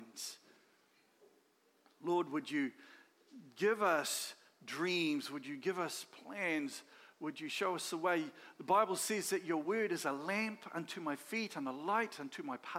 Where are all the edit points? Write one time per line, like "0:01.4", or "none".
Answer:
none